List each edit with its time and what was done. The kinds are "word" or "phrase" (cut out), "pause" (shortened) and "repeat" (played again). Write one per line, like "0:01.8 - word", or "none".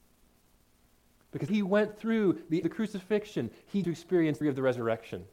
0:01.5 - word
0:02.6 - phrase
0:03.8 - word
0:04.4 - word